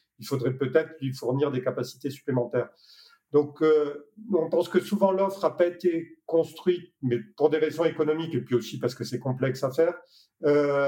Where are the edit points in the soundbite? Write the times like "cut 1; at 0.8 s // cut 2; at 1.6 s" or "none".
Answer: none